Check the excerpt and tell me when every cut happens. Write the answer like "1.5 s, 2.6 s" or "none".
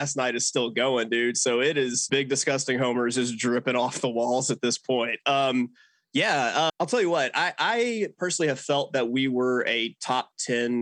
2.1 s, 6.7 s